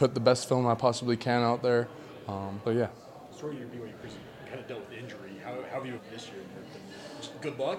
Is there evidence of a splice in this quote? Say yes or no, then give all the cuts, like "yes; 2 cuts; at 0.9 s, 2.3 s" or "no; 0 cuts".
yes; 2 cuts; at 2.6 s, 6.0 s